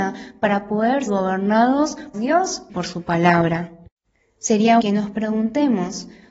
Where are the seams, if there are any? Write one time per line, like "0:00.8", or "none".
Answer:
0:01.1
0:02.1
0:02.7
0:04.8